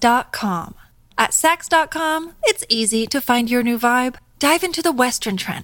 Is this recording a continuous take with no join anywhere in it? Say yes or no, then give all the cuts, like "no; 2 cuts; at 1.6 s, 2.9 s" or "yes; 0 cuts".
yes; 0 cuts